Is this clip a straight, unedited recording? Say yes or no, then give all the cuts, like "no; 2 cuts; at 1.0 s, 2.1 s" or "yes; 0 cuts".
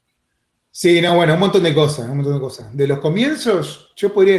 yes; 0 cuts